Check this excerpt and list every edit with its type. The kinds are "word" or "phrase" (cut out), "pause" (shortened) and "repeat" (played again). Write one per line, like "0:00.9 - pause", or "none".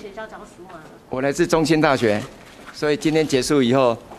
0:01.0 - pause